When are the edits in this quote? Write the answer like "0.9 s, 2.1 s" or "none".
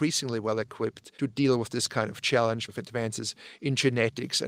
1.1 s, 2.7 s